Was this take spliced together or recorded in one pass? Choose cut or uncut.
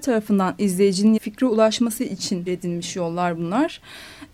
cut